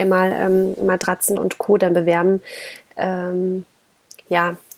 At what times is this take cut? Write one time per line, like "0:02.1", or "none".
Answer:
0:01.4